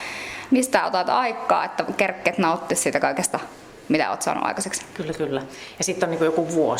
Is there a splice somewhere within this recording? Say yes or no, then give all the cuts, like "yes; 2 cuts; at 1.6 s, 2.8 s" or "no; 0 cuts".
no; 0 cuts